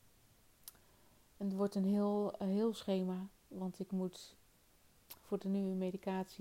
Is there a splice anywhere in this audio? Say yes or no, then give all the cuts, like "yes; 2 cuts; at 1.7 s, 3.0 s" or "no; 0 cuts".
no; 0 cuts